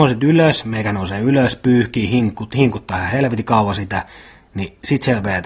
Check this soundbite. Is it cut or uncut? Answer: uncut